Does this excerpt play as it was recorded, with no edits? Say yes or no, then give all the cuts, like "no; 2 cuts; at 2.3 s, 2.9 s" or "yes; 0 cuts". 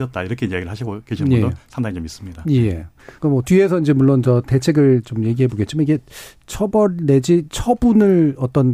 no; 1 cut; at 3.2 s